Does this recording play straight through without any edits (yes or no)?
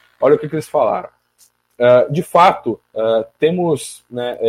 no